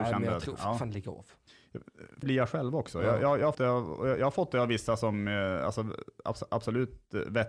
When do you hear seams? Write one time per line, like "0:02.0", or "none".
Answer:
0:02.2
0:03.5